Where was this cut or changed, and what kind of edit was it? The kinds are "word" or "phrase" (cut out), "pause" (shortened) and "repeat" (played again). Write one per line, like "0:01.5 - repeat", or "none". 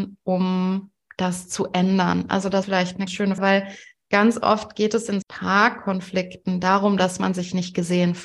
0:02.6 - word
0:03.1 - word
0:03.4 - word
0:05.2 - word